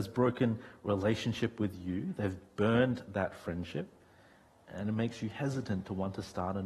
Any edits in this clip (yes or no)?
no